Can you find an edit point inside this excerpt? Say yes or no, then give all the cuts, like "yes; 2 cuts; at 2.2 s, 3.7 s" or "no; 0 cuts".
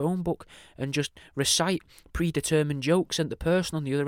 no; 0 cuts